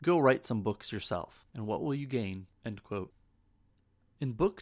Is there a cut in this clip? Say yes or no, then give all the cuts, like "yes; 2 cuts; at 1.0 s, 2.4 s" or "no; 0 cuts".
yes; 2 cuts; at 1.5 s, 2.5 s